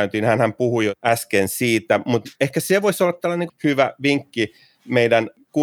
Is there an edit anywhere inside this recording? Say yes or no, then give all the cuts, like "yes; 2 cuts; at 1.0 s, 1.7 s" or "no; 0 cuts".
no; 0 cuts